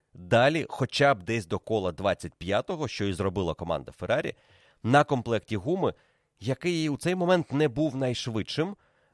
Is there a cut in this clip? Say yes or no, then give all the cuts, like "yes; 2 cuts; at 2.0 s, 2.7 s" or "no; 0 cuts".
no; 0 cuts